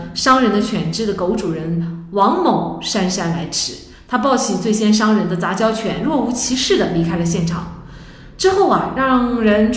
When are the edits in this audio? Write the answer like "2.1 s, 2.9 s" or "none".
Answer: none